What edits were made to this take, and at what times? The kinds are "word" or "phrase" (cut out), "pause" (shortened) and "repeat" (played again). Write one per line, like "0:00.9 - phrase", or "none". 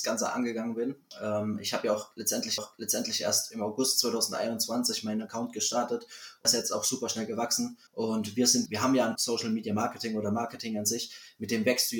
0:02.6 - repeat
0:06.4 - word
0:07.9 - pause
0:08.7 - word
0:09.1 - word

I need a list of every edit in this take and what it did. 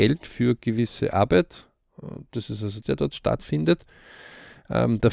0:02.8 - phrase

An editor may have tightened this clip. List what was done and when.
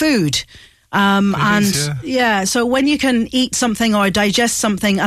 none

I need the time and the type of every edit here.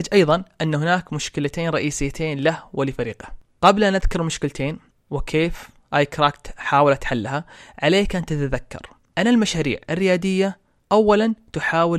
none

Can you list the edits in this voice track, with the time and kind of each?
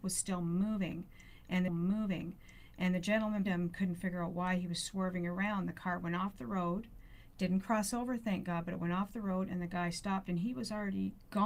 0:01.7 - repeat
0:03.4 - word

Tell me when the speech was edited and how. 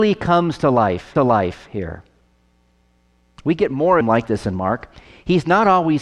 0:01.2 - repeat
0:04.0 - phrase

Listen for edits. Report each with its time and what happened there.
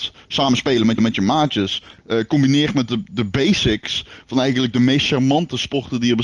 0:01.0 - repeat

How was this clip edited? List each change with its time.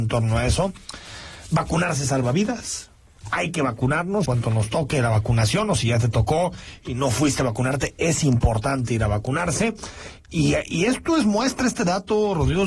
0:04.3 - word

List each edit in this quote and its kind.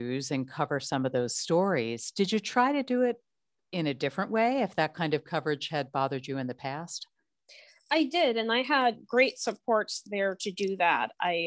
none

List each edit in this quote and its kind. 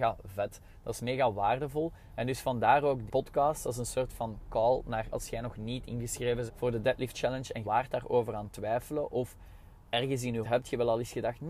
0:03.1 - word
0:05.1 - word
0:06.5 - word
0:07.1 - word
0:07.6 - word
0:10.4 - word

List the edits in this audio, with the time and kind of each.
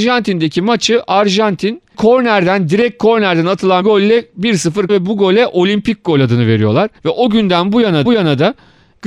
0:01.9 - word
0:03.8 - word
0:04.9 - word
0:07.0 - pause
0:08.1 - repeat

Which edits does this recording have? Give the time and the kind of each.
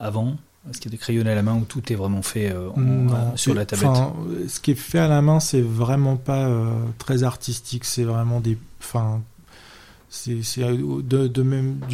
none

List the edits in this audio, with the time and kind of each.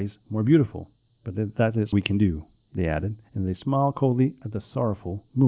0:01.1 - pause
0:01.9 - word
0:03.2 - pause

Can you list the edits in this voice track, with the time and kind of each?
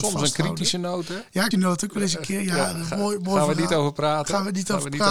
0:01.5 - word

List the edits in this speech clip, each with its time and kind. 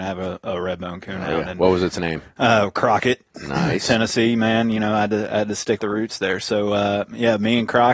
0:05.8 - word

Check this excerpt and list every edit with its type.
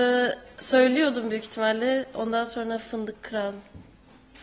none

